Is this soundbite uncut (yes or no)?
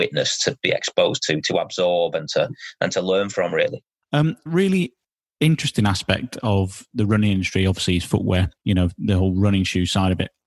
yes